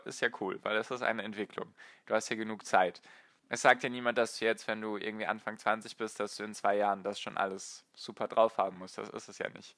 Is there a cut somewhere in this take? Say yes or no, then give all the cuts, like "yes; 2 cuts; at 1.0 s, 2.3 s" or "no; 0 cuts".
no; 0 cuts